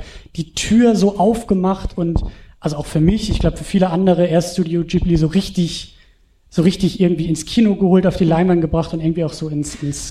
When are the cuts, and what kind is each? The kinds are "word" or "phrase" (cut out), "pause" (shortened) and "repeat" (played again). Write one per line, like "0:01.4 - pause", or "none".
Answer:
none